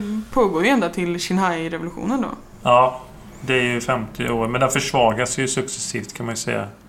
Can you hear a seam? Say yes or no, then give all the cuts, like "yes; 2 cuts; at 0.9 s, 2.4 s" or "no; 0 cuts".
no; 0 cuts